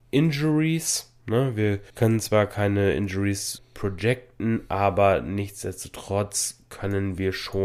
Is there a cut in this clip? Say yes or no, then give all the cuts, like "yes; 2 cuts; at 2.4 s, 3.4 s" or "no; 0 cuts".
yes; 2 cuts; at 1.9 s, 3.6 s